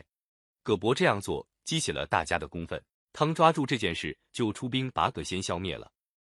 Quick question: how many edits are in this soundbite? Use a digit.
1